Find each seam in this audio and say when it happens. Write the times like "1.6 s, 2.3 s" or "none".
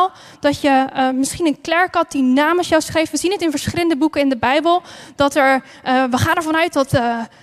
none